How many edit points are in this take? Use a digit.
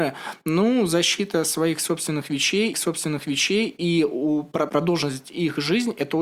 2